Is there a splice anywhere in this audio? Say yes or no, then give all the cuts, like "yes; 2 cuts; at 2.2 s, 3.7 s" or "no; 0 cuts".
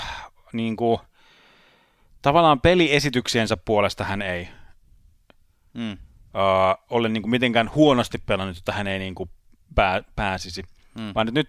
no; 0 cuts